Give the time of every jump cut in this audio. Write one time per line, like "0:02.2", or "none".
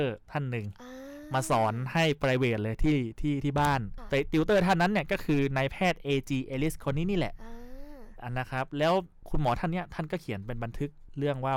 none